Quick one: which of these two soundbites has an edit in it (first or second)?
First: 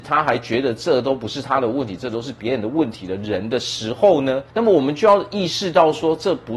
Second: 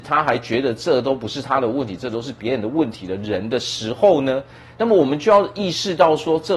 first